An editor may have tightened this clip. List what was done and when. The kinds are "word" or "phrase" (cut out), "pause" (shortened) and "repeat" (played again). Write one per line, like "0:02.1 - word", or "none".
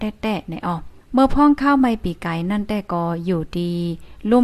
0:01.0 - pause